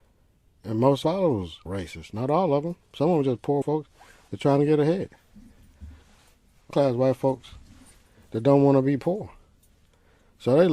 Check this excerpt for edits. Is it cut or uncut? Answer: cut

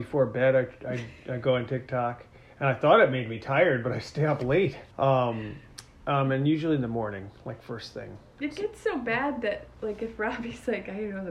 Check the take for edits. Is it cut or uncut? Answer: cut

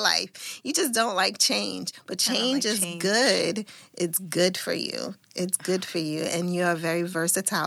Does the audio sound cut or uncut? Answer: cut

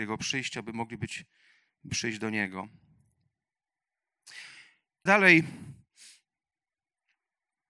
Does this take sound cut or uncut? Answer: cut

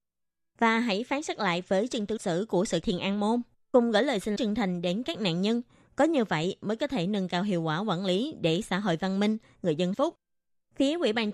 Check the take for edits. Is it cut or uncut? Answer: cut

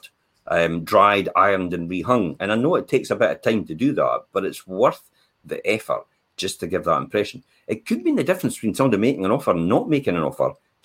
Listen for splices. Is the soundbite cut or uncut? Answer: uncut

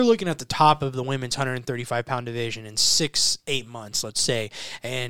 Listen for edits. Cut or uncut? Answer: uncut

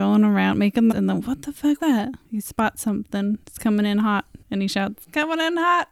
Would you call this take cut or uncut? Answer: cut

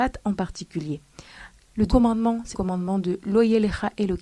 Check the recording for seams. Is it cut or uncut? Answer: cut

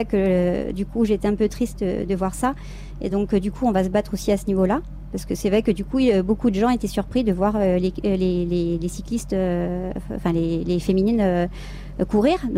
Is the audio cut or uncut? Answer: uncut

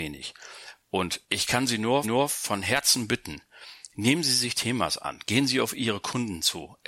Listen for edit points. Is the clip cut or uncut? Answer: cut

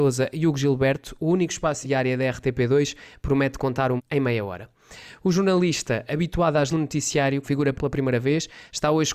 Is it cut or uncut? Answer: cut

